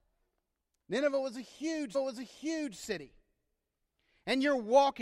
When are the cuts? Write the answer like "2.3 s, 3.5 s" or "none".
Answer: 1.9 s

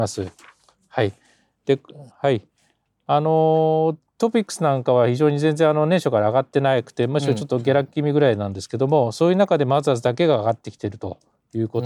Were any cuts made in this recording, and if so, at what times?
2.1 s

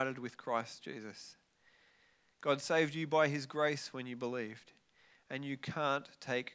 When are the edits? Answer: none

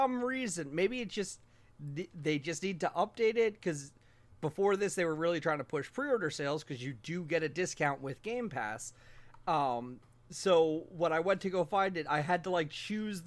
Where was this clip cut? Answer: none

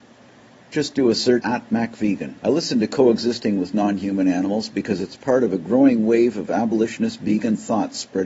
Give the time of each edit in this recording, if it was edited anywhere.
1.4 s, 2.4 s

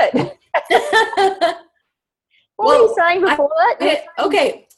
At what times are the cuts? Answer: none

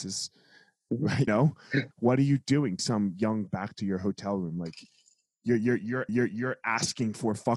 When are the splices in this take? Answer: 1.3 s, 1.9 s, 2.8 s, 3.5 s, 6.1 s

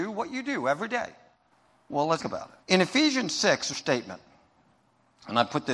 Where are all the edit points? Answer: 1.5 s, 2.2 s, 2.6 s, 3.7 s

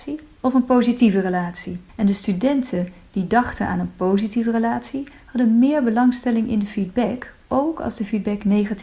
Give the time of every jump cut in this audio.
1.9 s

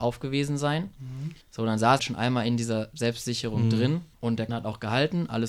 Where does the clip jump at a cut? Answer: 1.4 s, 2.0 s, 4.1 s, 4.5 s

